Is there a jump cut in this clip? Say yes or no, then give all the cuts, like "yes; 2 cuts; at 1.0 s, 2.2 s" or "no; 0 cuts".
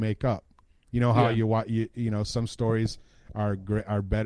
no; 0 cuts